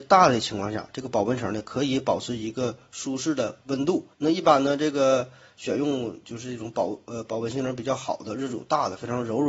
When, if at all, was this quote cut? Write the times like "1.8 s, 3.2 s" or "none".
4.1 s